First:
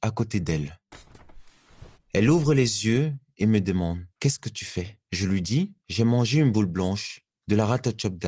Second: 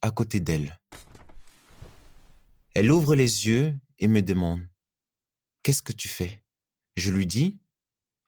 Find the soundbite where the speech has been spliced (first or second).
first